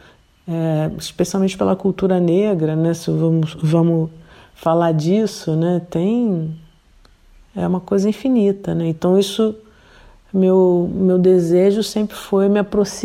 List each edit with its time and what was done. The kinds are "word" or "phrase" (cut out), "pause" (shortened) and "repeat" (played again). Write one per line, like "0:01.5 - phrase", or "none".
none

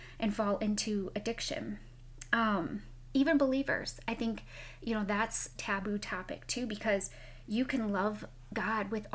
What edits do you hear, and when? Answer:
0:05.6 - phrase

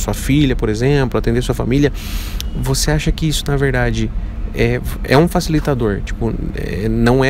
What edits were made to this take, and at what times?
none

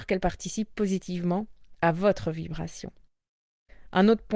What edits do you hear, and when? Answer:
none

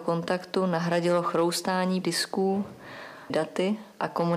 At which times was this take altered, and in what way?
0:02.0 - word
0:03.3 - phrase

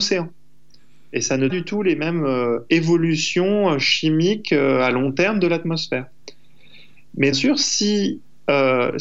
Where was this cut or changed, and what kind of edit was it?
0:01.5 - phrase
0:07.3 - phrase

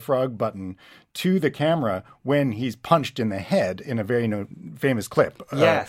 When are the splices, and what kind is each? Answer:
none

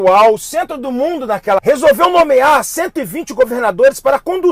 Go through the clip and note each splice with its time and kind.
0:01.6 - word

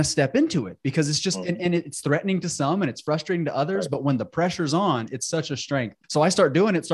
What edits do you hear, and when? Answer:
0:06.0 - pause

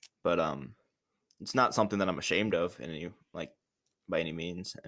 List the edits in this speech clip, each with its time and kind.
none

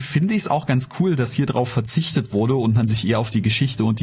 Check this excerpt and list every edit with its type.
none

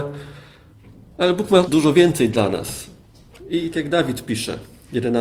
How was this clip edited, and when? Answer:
0:01.6 - word
0:03.7 - word

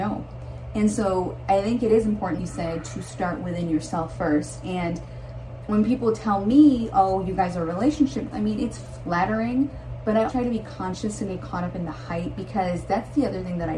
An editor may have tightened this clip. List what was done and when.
0:02.4 - word
0:08.3 - word
0:10.3 - word
0:11.3 - word

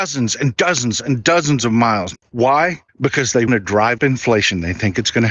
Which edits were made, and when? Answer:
0:02.9 - pause
0:03.5 - word
0:04.0 - word

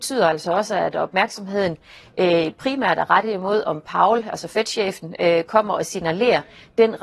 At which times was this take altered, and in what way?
none

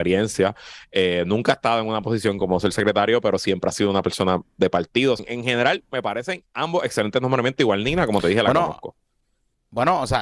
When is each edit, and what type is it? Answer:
0:05.2 - phrase

